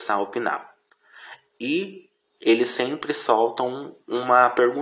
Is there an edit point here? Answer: no; 0 cuts

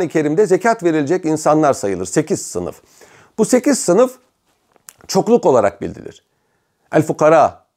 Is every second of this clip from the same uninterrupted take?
yes; 0 cuts

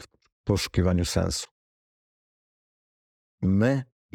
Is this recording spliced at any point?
no; 0 cuts

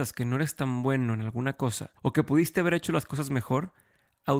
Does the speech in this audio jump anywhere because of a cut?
yes; 1 cut; at 2.0 s

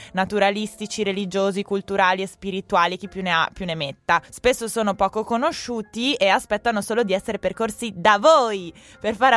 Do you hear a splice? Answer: yes; 1 cut; at 4.2 s

